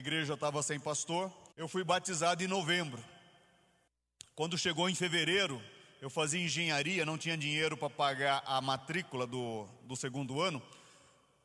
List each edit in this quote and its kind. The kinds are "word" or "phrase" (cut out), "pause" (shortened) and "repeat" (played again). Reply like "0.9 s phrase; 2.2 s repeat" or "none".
1.5 s pause